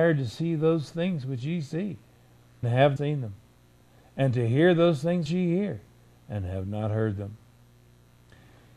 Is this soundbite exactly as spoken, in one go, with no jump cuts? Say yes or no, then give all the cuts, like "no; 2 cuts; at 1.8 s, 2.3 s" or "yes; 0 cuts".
no; 3 cuts; at 2.6 s, 3.0 s, 5.3 s